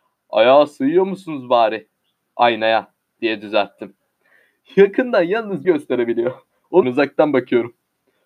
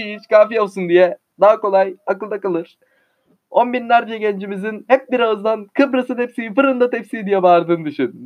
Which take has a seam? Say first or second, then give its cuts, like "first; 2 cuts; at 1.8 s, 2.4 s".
first; 2 cuts; at 5.6 s, 6.8 s